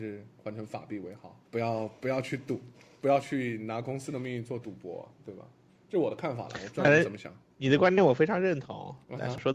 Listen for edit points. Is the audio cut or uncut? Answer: cut